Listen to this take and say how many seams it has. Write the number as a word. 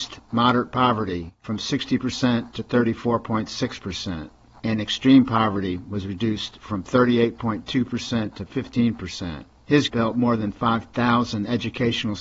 one